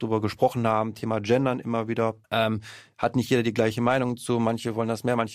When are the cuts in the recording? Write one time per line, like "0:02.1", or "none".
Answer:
0:02.2